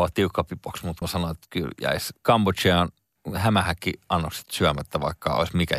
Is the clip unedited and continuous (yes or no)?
no